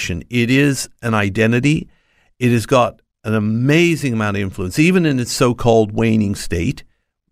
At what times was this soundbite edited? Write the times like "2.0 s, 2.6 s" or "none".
none

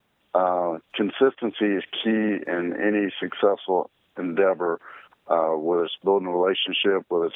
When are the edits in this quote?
2.4 s

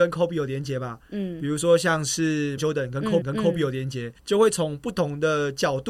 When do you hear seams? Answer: 2.6 s, 3.2 s, 4.2 s

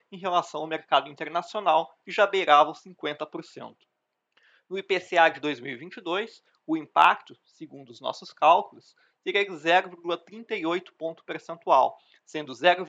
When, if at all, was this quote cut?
none

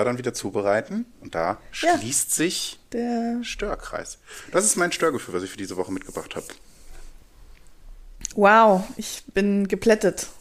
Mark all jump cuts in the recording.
1.1 s

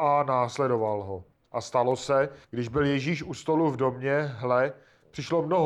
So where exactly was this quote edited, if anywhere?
1.3 s, 2.4 s

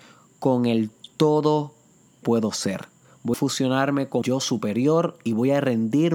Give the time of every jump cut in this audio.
2.2 s, 3.3 s, 4.2 s

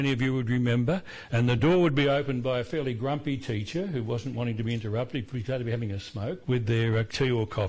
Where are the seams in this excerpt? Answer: none

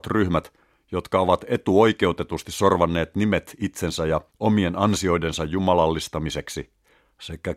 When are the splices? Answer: 4.3 s

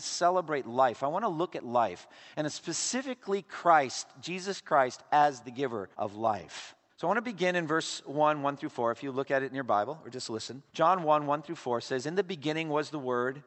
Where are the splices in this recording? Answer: 5.9 s, 6.9 s, 10.7 s

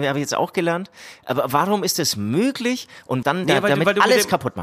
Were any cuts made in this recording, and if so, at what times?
3.2 s

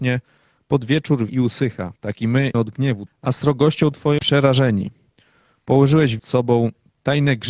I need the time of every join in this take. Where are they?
1.3 s, 2.0 s, 2.5 s, 3.1 s, 4.2 s, 6.2 s

